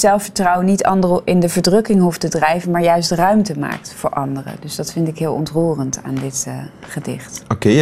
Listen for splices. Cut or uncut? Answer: uncut